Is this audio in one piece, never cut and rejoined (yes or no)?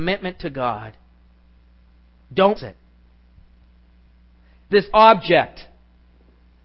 no